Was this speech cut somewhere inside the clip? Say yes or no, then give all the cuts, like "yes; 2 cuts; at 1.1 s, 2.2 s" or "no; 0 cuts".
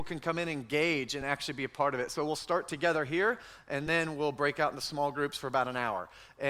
no; 0 cuts